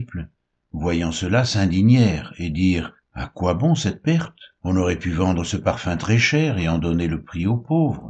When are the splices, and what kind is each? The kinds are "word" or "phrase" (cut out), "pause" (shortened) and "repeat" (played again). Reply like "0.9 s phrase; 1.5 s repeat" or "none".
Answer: 3.0 s pause; 4.6 s pause